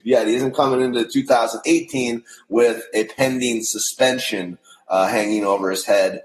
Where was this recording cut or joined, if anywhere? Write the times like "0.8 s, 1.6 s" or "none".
none